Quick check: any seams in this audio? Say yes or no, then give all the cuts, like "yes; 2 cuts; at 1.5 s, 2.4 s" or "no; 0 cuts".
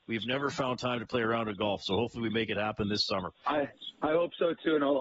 no; 0 cuts